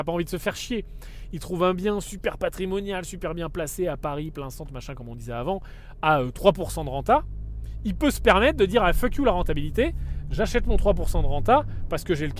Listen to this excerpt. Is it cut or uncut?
uncut